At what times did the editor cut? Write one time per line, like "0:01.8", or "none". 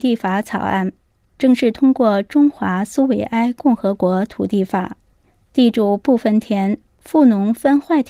none